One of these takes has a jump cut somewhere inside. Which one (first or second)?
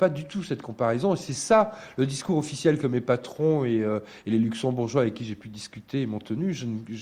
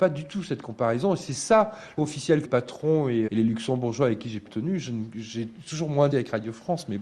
second